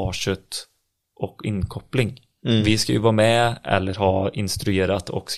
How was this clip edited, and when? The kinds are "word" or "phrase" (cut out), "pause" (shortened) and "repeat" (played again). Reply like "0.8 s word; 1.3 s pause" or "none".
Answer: none

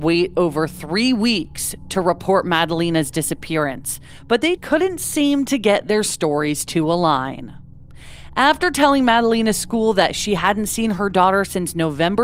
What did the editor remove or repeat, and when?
4.6 s word

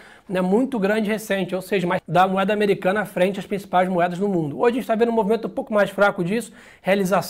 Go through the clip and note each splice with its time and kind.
2.0 s word

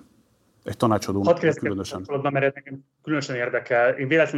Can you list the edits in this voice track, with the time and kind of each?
none

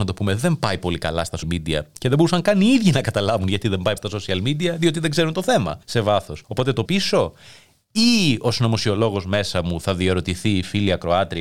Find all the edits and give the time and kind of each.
1.4 s word; 4.0 s phrase; 5.8 s pause; 6.4 s pause; 6.9 s word

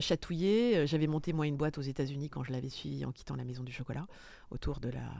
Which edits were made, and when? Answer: none

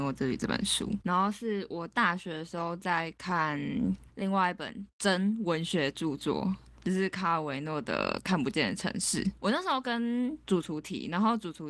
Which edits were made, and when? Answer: 1.0 s pause; 9.4 s pause

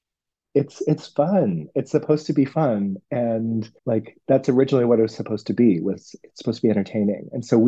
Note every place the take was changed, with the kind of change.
3.8 s pause

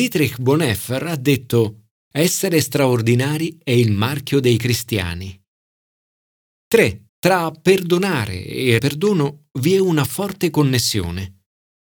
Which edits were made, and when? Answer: 7.1 s pause; 8.8 s word

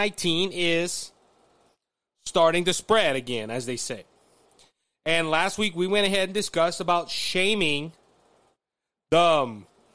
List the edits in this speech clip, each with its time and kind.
none

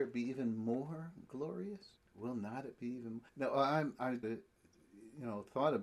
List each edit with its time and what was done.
2.0 s pause; 3.3 s pause; 4.2 s word

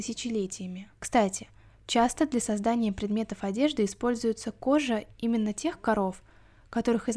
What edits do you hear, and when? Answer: 1.0 s pause

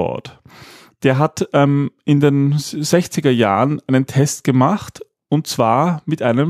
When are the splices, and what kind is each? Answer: none

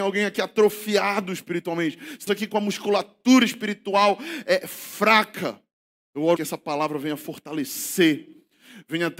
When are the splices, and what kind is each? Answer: 2.3 s phrase; 6.4 s word

